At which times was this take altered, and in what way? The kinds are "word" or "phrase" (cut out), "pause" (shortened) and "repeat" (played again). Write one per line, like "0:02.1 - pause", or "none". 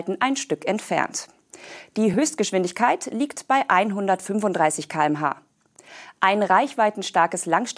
none